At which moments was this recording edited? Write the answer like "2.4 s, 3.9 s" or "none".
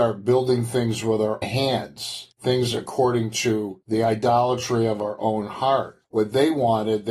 1.4 s